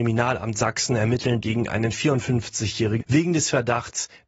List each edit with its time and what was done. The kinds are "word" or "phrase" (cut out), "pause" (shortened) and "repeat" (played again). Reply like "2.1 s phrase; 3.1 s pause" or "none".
1.4 s word; 3.0 s word

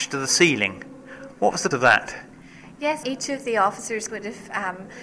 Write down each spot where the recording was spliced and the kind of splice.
1.7 s word; 3.0 s word; 4.1 s word

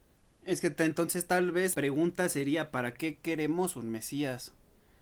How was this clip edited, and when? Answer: 1.7 s word

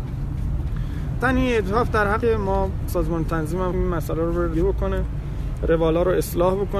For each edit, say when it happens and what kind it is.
1.2 s word; 2.2 s word; 2.9 s word; 3.7 s word; 4.5 s word

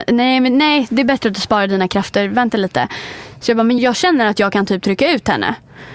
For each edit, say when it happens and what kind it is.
3.8 s word

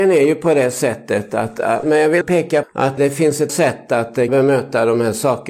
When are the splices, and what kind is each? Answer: 1.8 s word; 2.2 s word; 2.6 s word; 3.0 s word; 3.5 s word; 4.3 s word

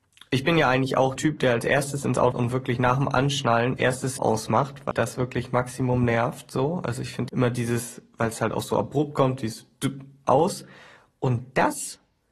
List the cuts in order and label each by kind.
1.2 s word; 2.3 s word; 3.8 s word; 4.2 s word; 4.9 s word; 7.3 s word

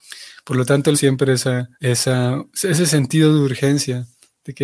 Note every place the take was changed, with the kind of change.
0.9 s word; 1.7 s pause

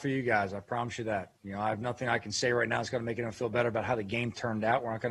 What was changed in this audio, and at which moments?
1.4 s pause

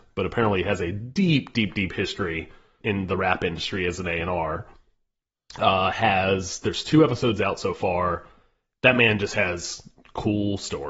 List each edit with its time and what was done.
2.8 s word

